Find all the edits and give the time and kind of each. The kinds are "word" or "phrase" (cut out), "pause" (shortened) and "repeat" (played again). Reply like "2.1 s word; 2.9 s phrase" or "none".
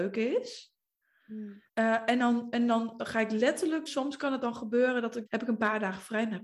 1.7 s pause; 3.9 s word; 5.3 s word